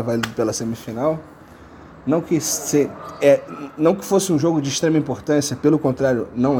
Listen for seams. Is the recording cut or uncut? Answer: uncut